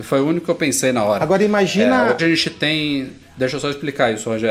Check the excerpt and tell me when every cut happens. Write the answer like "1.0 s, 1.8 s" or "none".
2.2 s